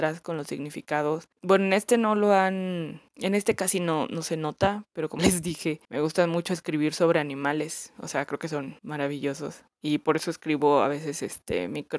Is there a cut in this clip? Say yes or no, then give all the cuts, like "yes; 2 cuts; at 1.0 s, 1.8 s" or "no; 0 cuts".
yes; 5 cuts; at 1.3 s, 3.1 s, 5.2 s, 5.8 s, 8.8 s